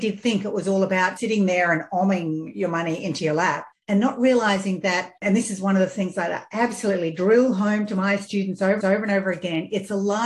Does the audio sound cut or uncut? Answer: cut